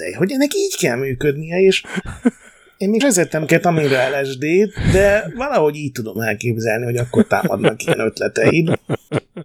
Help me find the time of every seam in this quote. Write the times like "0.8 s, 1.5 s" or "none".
3.0 s